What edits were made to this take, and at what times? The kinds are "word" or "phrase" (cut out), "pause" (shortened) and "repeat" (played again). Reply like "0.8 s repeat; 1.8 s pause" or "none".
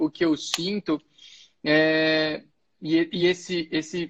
none